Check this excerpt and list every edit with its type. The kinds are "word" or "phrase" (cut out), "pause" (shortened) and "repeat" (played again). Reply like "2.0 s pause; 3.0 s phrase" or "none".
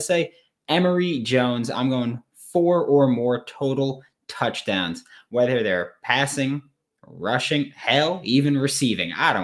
none